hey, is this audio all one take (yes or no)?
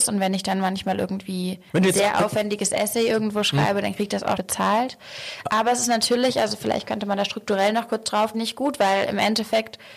no